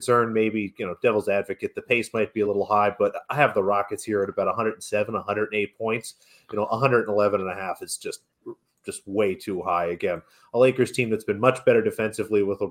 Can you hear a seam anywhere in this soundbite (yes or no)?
no